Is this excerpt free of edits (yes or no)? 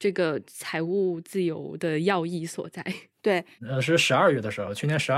yes